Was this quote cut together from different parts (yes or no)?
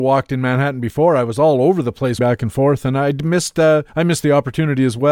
yes